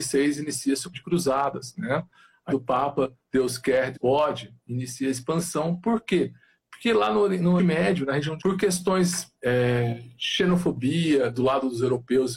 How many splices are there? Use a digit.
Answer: 6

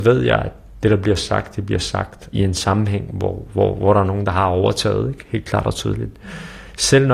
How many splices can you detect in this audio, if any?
0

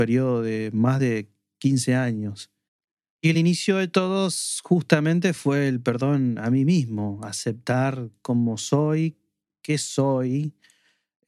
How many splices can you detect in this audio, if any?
0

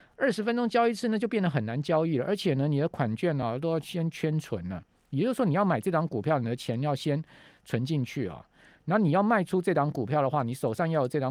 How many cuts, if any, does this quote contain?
0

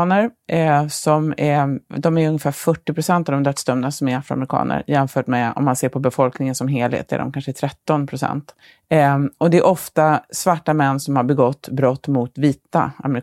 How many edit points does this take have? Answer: 1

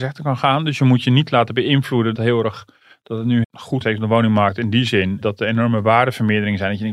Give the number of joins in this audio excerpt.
4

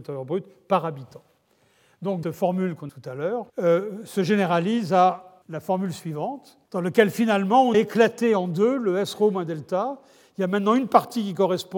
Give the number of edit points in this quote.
6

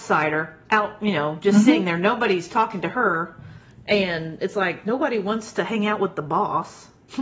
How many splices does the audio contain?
0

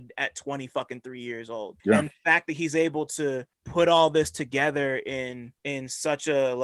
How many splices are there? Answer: 3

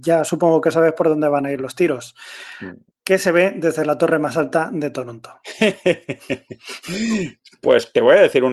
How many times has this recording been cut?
1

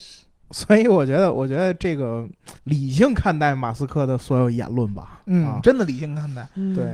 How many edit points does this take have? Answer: 1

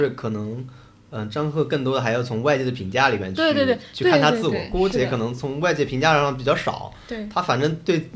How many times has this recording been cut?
0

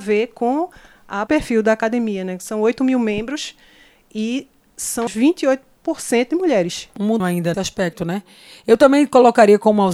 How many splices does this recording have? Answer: 4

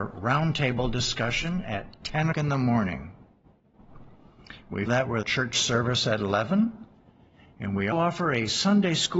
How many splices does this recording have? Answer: 4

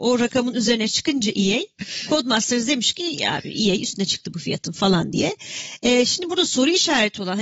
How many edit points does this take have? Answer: 0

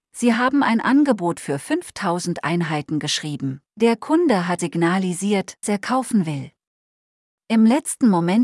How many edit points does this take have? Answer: 3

